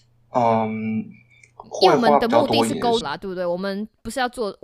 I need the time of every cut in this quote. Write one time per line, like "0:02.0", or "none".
0:03.0